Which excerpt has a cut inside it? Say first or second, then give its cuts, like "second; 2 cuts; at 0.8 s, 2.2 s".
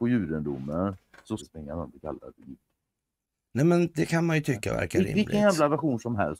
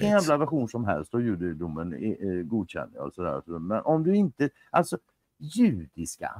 first; 1 cut; at 1.4 s